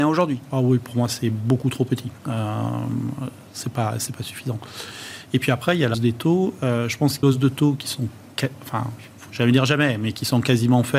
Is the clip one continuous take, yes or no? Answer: no